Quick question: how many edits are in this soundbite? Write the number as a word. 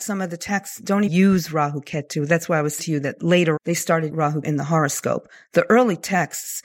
five